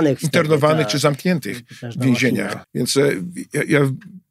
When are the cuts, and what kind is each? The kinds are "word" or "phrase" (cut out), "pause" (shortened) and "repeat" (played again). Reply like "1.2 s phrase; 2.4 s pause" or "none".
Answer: 2.6 s pause